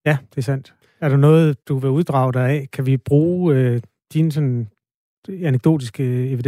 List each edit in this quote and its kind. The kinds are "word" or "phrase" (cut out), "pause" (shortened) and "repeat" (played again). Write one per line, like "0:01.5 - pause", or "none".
0:01.6 - pause